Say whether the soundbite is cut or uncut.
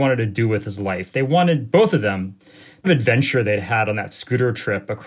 cut